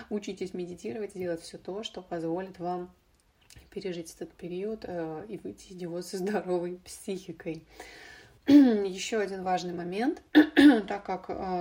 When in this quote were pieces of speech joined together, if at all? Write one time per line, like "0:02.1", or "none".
0:08.4
0:10.3